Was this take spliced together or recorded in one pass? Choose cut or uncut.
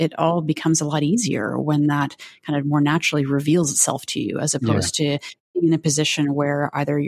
uncut